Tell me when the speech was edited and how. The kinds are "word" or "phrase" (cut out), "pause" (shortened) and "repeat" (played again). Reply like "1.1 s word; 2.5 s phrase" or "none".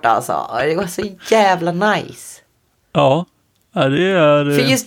none